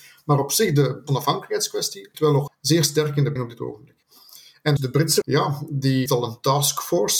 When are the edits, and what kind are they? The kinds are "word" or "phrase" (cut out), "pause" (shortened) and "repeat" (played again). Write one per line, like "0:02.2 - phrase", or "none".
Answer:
0:01.1 - word
0:02.1 - word
0:02.5 - word
0:03.4 - word
0:04.8 - word
0:05.2 - word
0:06.1 - word